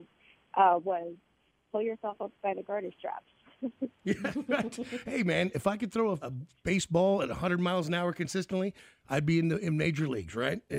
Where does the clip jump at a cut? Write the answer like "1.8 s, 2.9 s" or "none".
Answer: 6.2 s